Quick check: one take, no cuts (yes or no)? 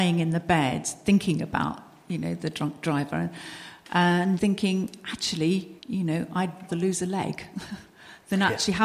no